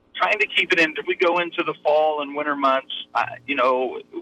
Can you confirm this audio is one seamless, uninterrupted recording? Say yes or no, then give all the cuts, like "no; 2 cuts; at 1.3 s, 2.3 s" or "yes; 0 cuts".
no; 1 cut; at 1.0 s